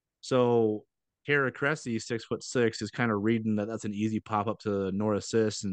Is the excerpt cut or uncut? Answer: uncut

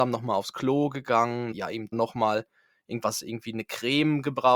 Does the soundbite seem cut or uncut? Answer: cut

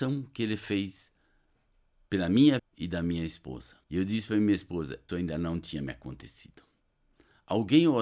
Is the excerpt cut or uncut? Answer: cut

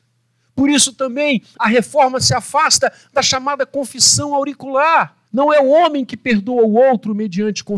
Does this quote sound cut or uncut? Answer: cut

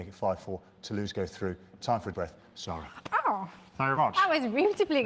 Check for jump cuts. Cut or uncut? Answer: cut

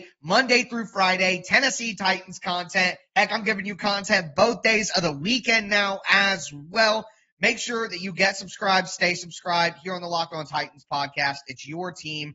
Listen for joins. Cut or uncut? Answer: uncut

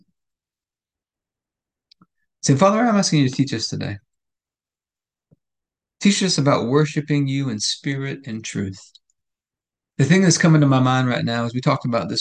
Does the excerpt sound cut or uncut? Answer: uncut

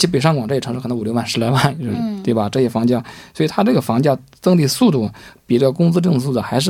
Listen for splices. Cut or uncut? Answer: uncut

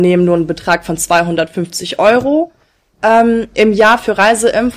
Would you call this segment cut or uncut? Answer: uncut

